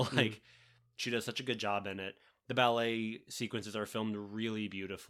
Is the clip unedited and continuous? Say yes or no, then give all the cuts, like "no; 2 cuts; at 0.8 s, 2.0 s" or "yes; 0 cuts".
yes; 0 cuts